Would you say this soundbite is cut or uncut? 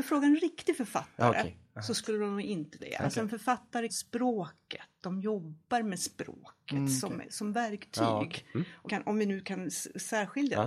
cut